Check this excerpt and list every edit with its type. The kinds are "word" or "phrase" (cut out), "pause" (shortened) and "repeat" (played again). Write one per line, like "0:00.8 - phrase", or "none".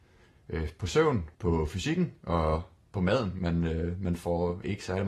0:01.3 - pause